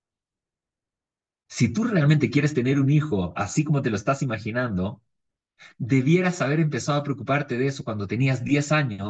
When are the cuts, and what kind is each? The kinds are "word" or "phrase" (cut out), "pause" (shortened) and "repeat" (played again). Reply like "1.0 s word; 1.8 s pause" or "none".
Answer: none